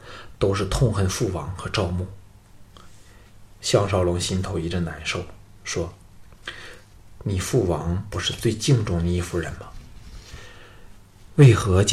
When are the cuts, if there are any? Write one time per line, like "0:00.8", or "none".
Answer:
0:02.7